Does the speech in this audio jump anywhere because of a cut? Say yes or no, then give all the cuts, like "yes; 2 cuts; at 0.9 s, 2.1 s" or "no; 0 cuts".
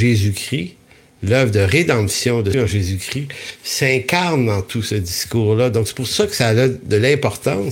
yes; 1 cut; at 2.5 s